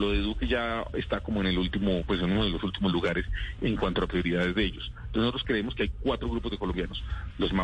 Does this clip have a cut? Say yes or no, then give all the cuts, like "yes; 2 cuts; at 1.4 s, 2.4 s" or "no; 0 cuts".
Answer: no; 0 cuts